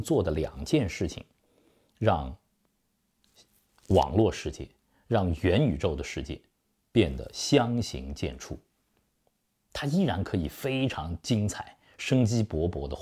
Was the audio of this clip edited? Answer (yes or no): no